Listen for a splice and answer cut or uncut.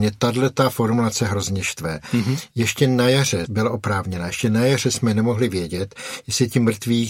uncut